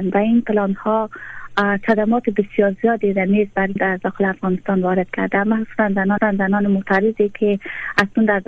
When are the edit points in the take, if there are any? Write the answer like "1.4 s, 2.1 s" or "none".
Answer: 3.8 s, 6.2 s